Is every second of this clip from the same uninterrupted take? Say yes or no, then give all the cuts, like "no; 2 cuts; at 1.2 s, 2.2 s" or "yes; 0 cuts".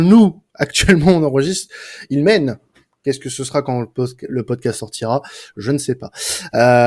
yes; 0 cuts